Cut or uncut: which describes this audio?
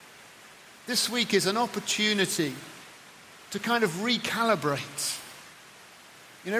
uncut